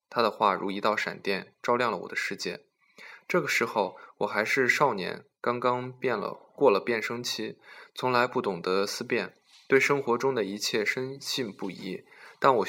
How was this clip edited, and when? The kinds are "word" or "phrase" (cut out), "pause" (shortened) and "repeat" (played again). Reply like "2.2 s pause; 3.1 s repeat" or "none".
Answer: none